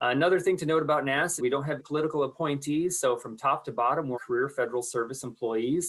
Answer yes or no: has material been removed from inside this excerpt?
yes